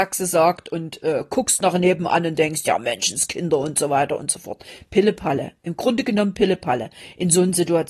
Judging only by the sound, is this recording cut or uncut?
uncut